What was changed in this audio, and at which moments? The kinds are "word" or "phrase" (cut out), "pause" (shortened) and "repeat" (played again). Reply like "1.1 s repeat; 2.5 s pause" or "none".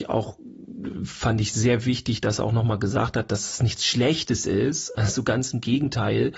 none